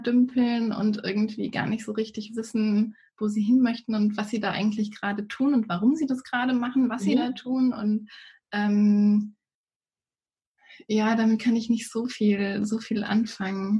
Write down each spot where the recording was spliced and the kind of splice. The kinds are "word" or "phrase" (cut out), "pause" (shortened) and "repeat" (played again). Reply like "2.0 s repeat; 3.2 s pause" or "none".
none